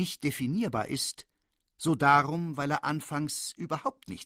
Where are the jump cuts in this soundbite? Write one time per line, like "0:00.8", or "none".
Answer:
none